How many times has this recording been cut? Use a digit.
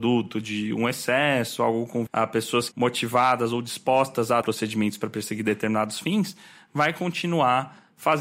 3